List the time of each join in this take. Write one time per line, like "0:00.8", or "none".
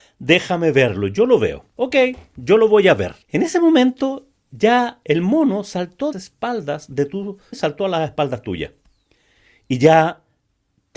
0:01.7
0:03.2
0:06.1
0:07.5